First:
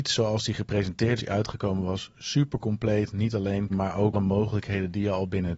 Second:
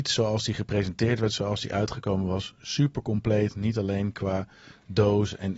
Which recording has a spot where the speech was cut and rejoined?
first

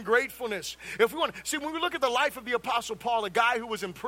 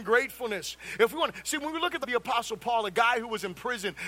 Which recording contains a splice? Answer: second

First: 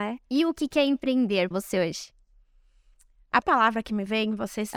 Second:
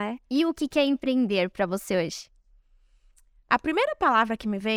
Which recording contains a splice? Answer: first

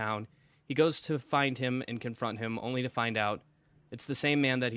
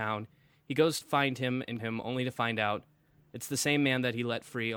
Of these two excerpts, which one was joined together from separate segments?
second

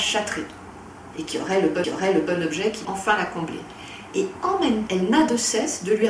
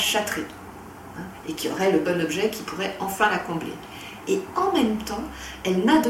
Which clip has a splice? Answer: first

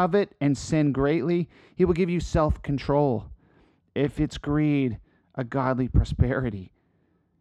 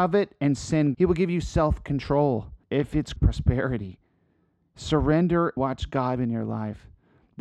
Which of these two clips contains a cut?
second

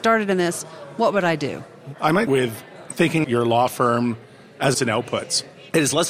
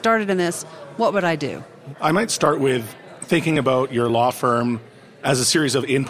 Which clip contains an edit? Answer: first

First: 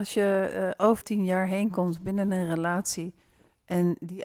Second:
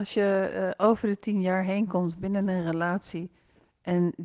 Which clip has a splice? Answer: first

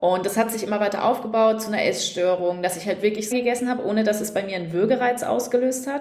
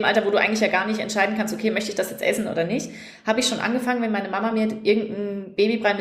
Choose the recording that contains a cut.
first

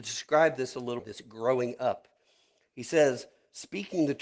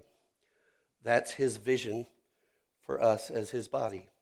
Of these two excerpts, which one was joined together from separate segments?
first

